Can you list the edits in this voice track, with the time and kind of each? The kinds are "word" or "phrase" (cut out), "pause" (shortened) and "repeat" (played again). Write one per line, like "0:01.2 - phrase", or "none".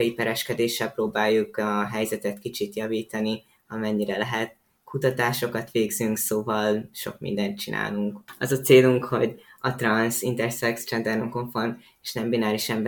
none